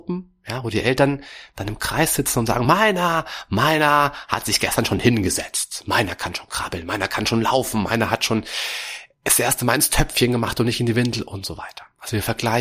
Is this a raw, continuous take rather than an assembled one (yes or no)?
yes